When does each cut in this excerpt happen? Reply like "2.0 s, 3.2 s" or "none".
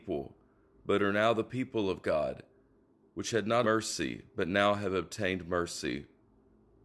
3.6 s